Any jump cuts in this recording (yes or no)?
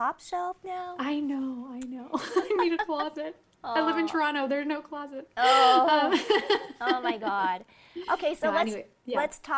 no